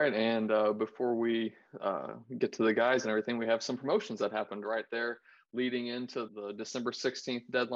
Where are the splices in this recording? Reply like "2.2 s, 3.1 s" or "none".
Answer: 6.3 s